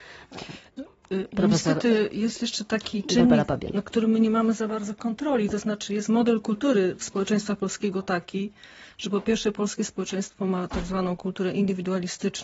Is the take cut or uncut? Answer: uncut